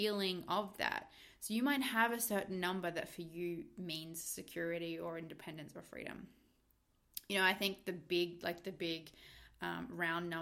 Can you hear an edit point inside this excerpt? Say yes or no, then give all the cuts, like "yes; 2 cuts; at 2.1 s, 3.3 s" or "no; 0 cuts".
no; 0 cuts